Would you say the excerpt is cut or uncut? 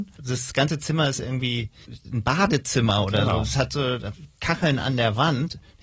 uncut